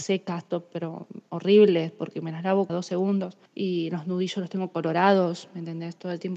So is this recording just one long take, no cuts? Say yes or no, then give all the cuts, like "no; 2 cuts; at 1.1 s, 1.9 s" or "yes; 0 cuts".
no; 2 cuts; at 2.7 s, 3.5 s